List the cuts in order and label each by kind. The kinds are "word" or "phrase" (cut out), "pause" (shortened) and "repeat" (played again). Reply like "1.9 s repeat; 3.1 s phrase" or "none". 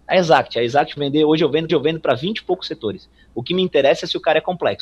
1.0 s word; 1.7 s repeat